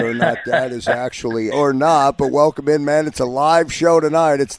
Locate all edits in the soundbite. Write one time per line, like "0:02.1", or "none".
0:01.5